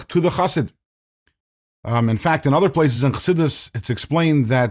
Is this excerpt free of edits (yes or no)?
yes